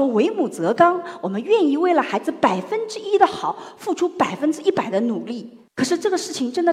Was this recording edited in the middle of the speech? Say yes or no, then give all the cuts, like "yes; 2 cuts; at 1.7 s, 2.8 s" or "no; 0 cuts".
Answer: yes; 1 cut; at 5.7 s